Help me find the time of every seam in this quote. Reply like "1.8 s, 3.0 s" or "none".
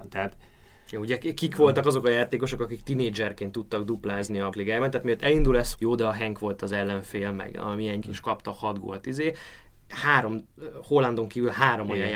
4.5 s, 5.7 s, 8.0 s